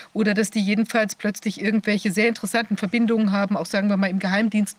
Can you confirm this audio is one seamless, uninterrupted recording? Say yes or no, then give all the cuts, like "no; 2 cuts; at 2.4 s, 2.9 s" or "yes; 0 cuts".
yes; 0 cuts